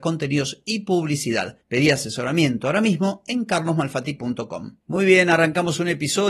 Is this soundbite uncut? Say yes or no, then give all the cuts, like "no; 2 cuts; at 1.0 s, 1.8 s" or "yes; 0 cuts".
yes; 0 cuts